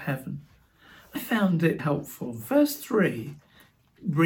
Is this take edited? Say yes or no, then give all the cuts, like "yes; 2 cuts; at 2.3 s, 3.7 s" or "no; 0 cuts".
yes; 2 cuts; at 1.1 s, 1.8 s